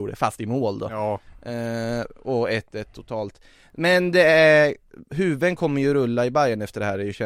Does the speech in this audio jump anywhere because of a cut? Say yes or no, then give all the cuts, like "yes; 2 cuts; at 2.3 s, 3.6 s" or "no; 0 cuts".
no; 0 cuts